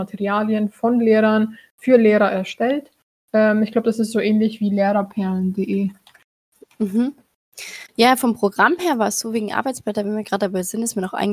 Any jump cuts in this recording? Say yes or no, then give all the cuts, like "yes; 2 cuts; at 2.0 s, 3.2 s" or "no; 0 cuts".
no; 0 cuts